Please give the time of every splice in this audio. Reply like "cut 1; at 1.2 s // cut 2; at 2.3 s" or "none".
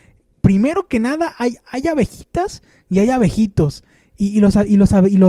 none